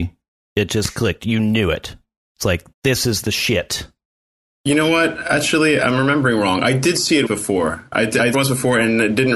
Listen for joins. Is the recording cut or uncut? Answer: cut